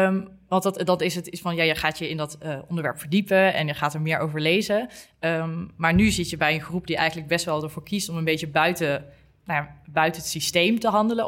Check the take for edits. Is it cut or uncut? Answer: uncut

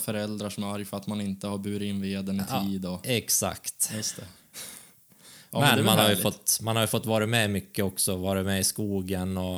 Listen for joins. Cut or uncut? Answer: uncut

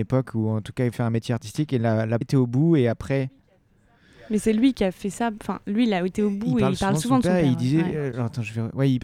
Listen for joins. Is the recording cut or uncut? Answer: cut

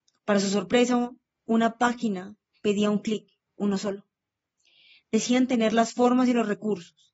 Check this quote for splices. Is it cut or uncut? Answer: uncut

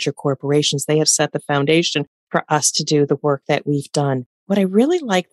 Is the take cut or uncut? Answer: cut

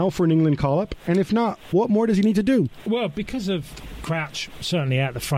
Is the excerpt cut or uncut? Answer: uncut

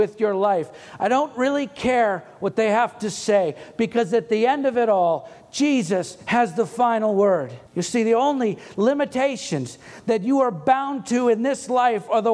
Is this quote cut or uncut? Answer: cut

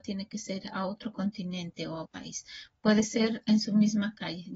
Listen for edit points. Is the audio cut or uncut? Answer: cut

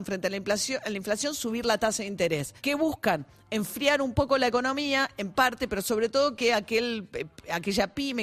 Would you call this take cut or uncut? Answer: cut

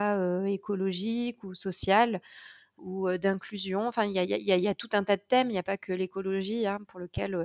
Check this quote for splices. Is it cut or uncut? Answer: cut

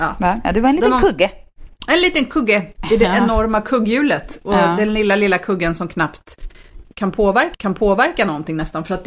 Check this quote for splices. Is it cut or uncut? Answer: cut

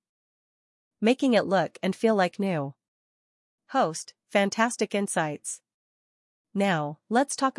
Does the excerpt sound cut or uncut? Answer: uncut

